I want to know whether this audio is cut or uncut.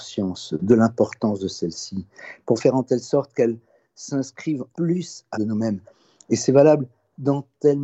cut